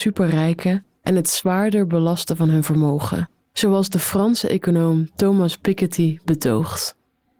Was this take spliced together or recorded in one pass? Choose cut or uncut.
uncut